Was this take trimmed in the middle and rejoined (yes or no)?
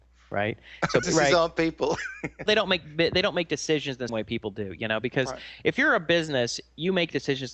yes